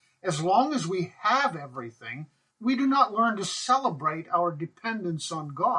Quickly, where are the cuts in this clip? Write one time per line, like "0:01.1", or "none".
0:02.5